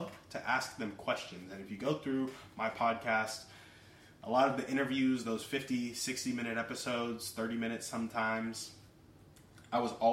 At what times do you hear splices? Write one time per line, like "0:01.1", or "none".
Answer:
none

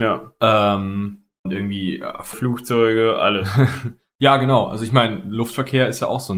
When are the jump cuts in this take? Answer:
0:01.5
0:02.3

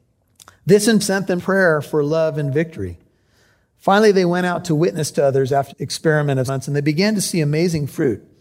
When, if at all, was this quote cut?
0:01.0
0:01.4
0:05.7
0:06.5

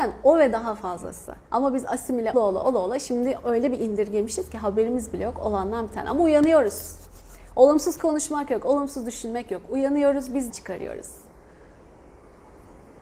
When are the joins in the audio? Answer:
0:01.4
0:02.3
0:10.5

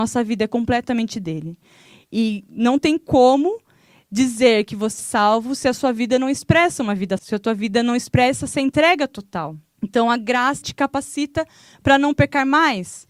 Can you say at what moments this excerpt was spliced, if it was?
0:05.0
0:07.2
0:10.6

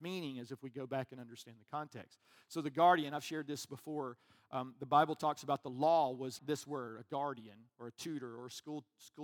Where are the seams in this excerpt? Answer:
0:06.4
0:07.7

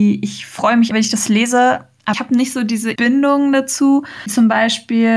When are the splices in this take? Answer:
0:00.9
0:02.1
0:03.0
0:04.3

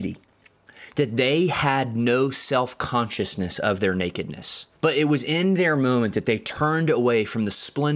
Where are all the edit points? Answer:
0:04.7

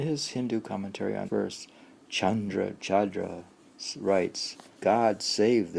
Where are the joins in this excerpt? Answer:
0:01.3
0:02.0
0:04.8

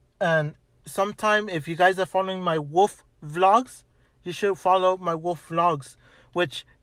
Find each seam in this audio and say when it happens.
none

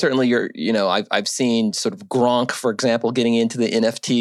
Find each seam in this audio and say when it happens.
none

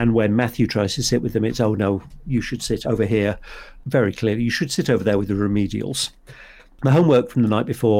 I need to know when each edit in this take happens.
0:02.8

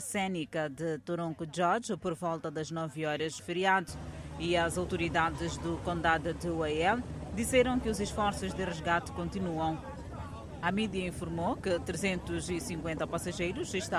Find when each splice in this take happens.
0:03.4

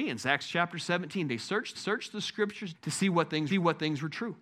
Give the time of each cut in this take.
0:01.7
0:02.7
0:03.5

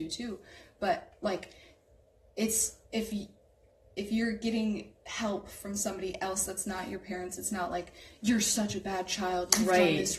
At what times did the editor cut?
0:02.8

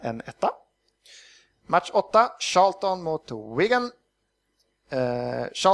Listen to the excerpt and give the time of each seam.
none

